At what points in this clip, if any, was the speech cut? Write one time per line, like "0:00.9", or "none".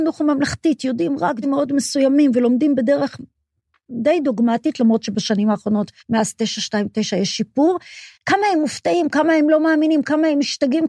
0:01.4
0:06.0
0:08.1